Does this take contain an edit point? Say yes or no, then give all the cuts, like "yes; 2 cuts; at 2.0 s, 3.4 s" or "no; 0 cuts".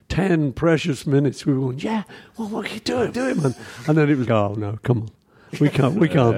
yes; 2 cuts; at 3.1 s, 4.3 s